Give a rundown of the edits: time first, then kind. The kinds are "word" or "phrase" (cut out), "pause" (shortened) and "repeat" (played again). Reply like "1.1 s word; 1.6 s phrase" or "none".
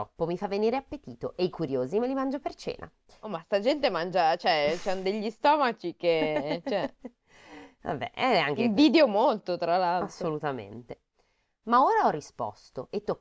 none

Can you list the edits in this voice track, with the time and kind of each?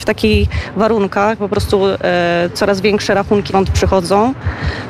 1.4 s word; 3.5 s word

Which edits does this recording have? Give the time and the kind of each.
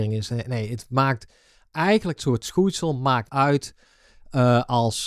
2.2 s word; 3.3 s word

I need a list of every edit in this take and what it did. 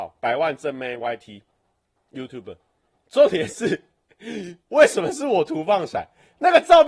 none

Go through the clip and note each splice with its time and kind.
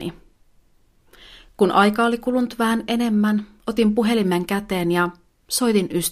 3.6 s pause

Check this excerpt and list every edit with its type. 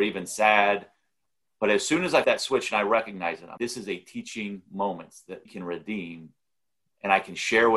2.2 s word; 3.6 s word; 5.5 s word

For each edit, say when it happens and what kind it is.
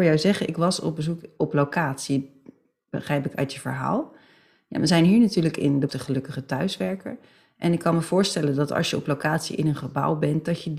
5.9 s word

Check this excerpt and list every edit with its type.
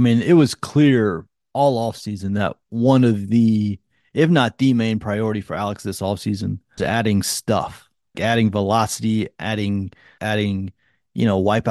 6.8 s word; 8.1 s word; 10.2 s word

